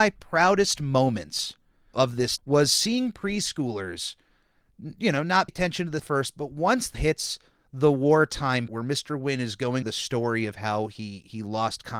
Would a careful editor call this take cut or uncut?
cut